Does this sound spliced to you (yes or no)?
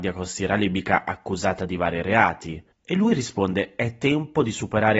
yes